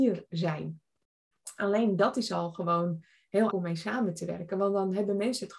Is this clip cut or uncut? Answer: cut